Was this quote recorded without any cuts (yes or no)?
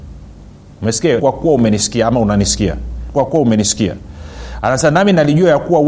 no